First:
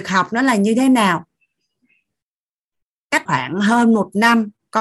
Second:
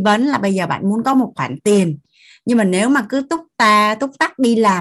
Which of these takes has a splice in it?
first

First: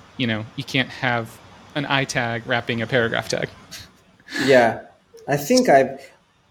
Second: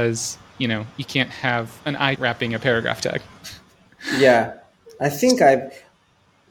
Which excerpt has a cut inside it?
second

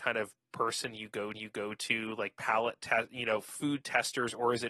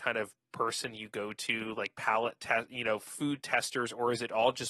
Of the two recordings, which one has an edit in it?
first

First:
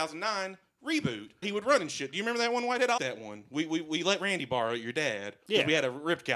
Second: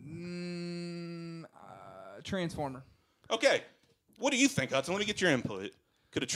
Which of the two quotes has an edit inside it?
first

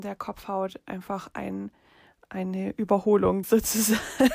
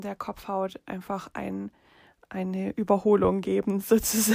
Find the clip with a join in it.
first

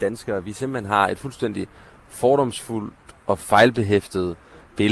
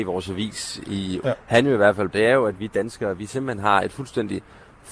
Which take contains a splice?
second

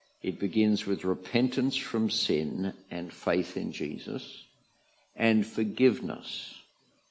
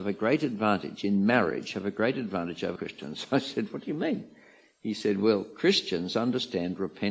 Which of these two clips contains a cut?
second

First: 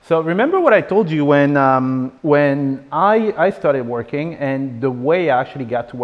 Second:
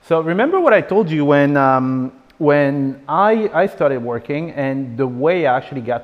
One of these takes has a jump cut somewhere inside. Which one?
first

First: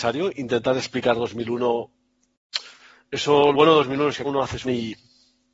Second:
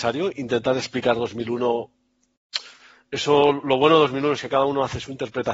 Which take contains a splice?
first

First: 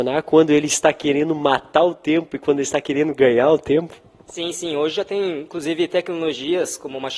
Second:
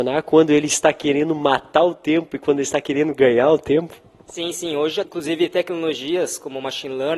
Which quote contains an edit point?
second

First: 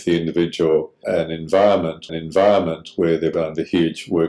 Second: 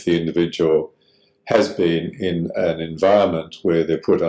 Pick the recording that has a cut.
first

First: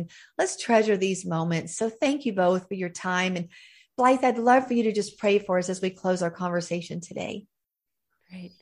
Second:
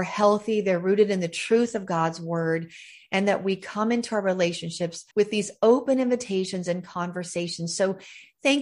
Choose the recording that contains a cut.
second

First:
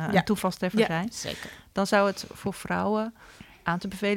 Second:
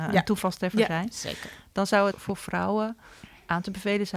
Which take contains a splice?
second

